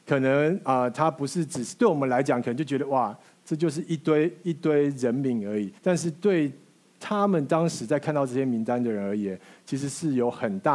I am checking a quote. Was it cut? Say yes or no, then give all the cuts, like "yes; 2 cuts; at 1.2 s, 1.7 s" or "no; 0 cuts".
yes; 1 cut; at 5.8 s